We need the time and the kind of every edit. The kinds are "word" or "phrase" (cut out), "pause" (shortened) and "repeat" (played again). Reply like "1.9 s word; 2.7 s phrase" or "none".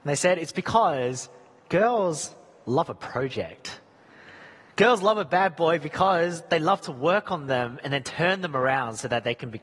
none